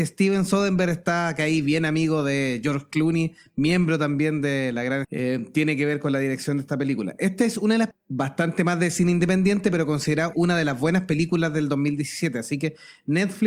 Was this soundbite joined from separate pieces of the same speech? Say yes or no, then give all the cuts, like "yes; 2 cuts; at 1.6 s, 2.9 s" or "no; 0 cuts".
yes; 3 cuts; at 5.0 s, 7.9 s, 10.3 s